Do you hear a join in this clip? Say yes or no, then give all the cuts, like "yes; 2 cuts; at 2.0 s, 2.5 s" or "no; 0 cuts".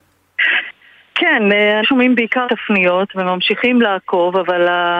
yes; 2 cuts; at 1.8 s, 2.4 s